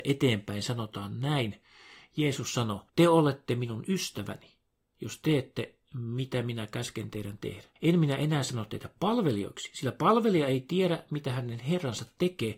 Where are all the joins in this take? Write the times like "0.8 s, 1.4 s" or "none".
2.9 s, 7.8 s